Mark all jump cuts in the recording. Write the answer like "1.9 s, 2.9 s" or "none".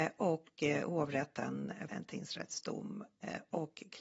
1.9 s